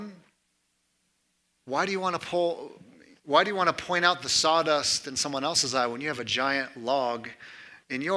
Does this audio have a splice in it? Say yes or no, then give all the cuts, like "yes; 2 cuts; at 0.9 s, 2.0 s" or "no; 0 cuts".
no; 0 cuts